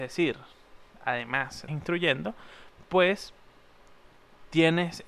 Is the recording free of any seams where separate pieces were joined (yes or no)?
no